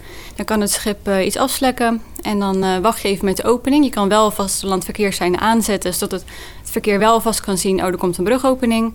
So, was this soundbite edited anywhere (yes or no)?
no